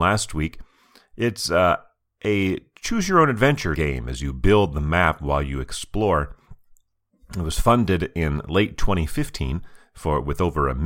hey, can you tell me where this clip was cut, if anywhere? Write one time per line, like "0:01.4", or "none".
0:03.8